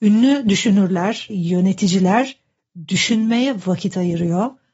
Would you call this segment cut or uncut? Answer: cut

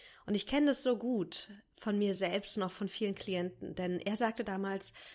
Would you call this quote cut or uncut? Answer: uncut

